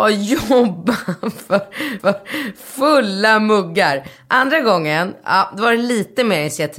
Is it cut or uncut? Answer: cut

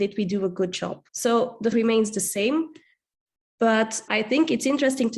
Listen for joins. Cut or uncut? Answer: cut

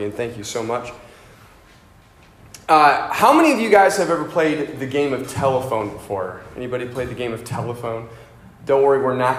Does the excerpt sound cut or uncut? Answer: uncut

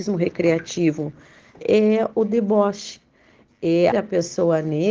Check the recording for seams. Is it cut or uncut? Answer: cut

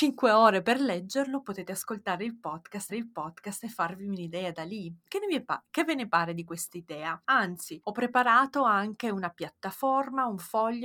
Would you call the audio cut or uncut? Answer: cut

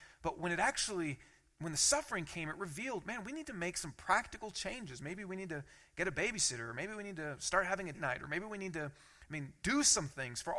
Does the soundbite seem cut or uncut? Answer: cut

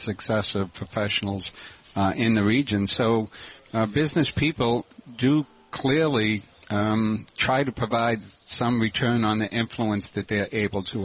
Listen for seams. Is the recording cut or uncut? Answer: uncut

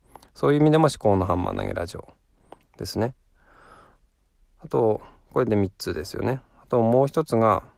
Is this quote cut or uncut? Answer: uncut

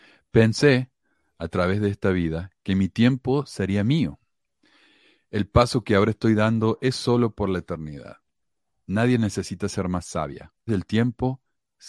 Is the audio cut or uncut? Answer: cut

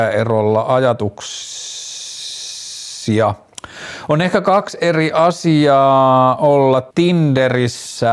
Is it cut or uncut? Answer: cut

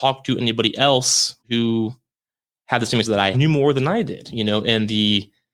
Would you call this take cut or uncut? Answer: cut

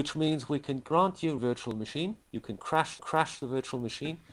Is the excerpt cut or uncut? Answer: cut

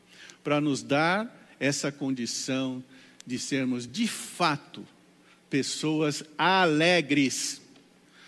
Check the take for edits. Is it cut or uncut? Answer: uncut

